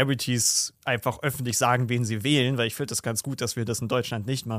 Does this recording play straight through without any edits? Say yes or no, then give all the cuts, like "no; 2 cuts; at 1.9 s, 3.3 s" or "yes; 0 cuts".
yes; 0 cuts